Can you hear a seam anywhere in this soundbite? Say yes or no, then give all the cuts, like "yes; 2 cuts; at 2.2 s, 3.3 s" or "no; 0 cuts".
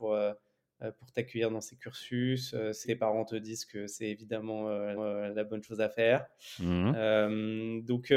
yes; 2 cuts; at 2.8 s, 5.0 s